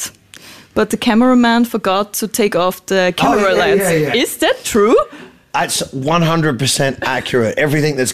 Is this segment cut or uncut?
uncut